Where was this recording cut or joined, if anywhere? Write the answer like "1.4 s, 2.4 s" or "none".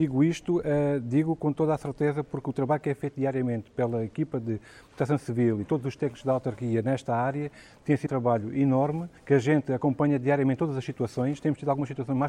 8.1 s, 9.2 s